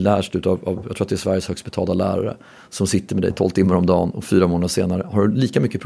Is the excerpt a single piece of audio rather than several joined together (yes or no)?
yes